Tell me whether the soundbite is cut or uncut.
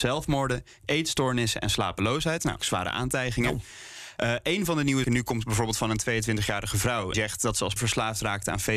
cut